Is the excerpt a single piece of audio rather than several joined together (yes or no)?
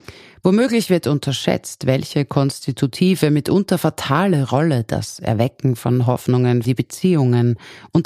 no